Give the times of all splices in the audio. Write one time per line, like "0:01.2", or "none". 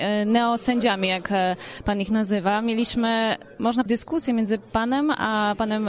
0:03.9